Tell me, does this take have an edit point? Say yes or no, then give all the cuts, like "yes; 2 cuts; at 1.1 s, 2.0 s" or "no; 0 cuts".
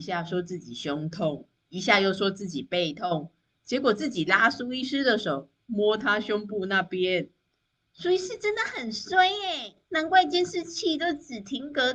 yes; 1 cut; at 9.8 s